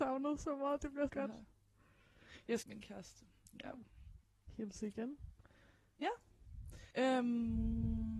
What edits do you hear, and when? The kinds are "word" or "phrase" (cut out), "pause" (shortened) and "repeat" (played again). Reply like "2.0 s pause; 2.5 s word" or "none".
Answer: 1.1 s word; 2.6 s phrase; 6.9 s pause

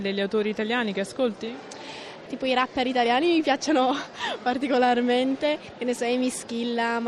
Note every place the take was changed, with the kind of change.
none

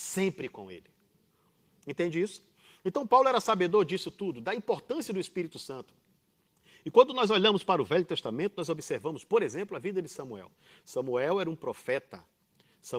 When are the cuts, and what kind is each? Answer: none

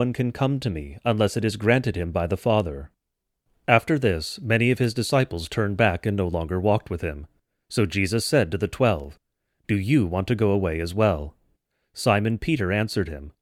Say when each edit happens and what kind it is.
none

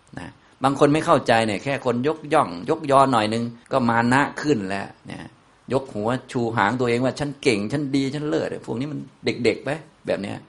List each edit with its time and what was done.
3.6 s pause; 5.0 s pause

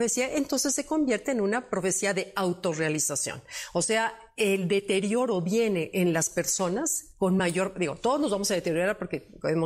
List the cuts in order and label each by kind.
none

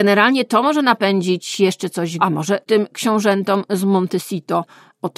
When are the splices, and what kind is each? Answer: 2.2 s word

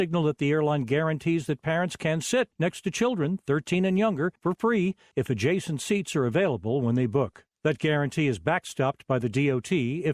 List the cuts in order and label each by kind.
none

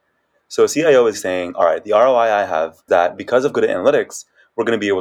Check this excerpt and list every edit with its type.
1.1 s word; 2.9 s word

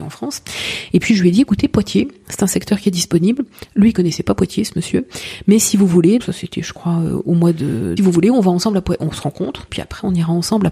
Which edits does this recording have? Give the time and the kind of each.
6.2 s word; 8.0 s phrase; 9.7 s word

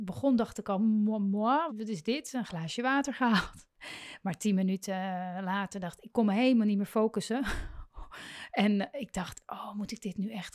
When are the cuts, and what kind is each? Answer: 1.7 s word

